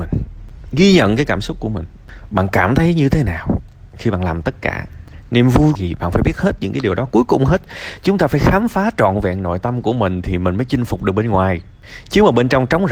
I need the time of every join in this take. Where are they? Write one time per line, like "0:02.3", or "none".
0:05.7